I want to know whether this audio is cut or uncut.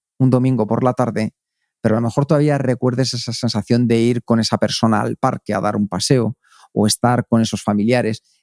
uncut